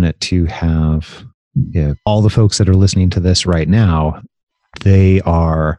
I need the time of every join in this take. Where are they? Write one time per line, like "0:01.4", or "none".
0:02.0